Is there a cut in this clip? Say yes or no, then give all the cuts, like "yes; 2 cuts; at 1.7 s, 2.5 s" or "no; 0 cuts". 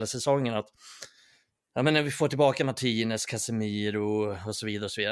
no; 0 cuts